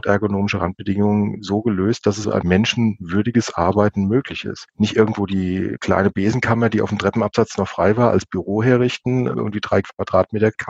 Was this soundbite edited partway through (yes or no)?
yes